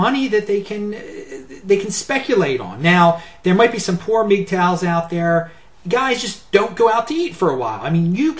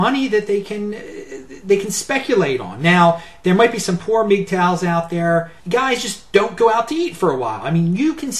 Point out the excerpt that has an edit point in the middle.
second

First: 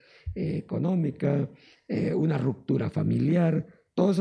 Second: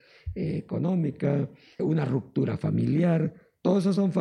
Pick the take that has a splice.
second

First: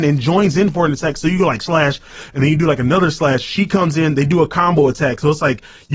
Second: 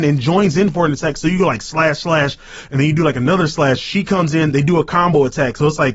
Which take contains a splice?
first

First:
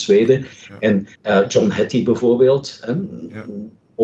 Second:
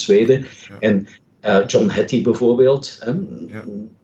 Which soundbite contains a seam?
first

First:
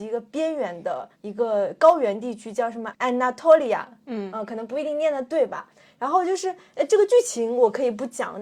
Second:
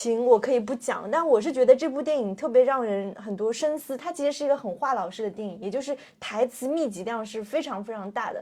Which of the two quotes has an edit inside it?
first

